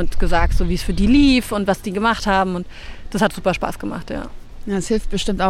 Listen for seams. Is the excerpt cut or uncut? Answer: uncut